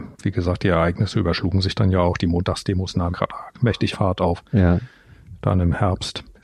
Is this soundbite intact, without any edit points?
no; 2 cuts; at 3.1 s, 3.9 s

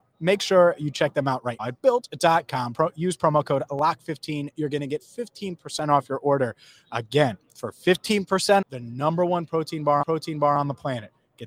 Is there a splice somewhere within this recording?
yes; 3 cuts; at 1.6 s, 8.6 s, 10.0 s

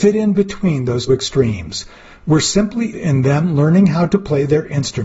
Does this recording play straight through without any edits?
no; 2 cuts; at 1.1 s, 2.9 s

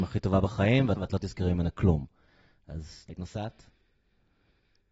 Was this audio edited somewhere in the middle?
yes; 2 cuts; at 1.0 s, 3.1 s

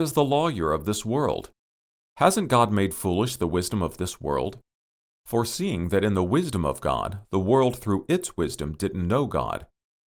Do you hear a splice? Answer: no; 0 cuts

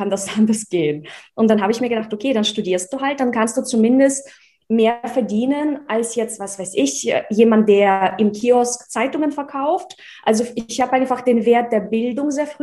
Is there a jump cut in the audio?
no; 0 cuts

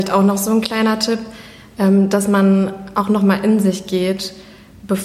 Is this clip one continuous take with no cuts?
yes; 0 cuts

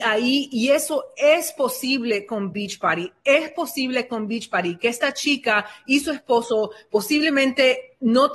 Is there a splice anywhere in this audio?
no; 0 cuts

